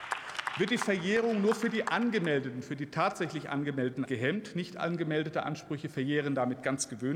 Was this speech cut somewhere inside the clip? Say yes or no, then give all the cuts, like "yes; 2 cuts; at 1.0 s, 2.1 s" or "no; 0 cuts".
yes; 1 cut; at 4.0 s